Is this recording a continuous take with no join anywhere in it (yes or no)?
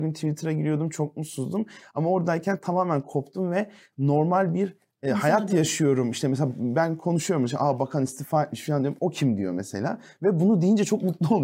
yes